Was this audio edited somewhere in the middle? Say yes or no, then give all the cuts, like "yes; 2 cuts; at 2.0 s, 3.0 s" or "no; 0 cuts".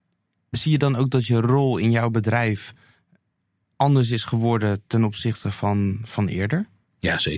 no; 0 cuts